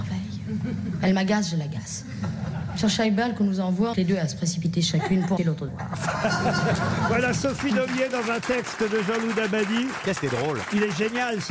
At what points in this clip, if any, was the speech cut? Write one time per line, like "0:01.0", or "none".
0:03.9
0:05.4
0:05.7
0:10.2